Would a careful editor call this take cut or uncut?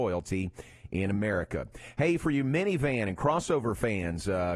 uncut